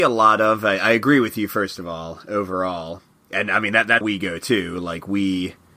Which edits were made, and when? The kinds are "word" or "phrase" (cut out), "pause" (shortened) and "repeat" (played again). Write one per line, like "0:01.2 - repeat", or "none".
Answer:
0:04.0 - word